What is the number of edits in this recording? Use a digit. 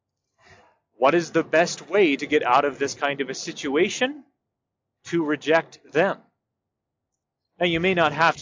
0